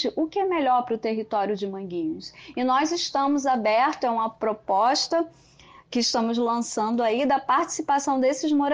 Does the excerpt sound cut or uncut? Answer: uncut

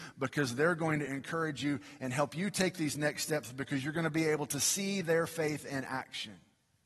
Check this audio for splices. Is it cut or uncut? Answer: uncut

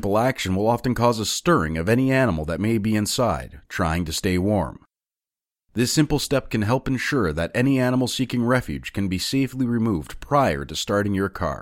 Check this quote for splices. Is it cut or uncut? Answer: uncut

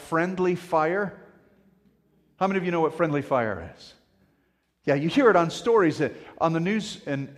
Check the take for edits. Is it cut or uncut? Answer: uncut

